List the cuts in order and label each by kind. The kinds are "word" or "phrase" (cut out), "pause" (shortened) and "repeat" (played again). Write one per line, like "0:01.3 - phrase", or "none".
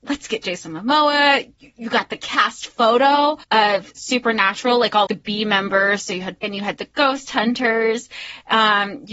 0:03.4 - pause
0:05.1 - word
0:06.4 - word